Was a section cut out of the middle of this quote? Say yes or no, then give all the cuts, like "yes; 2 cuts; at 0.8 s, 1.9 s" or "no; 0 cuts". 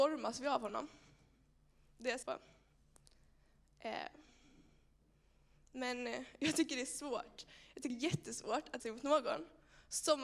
yes; 3 cuts; at 2.2 s, 7.9 s, 8.8 s